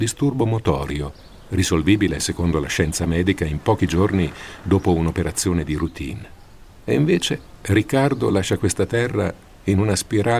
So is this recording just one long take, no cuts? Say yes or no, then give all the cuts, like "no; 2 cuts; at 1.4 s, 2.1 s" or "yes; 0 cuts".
yes; 0 cuts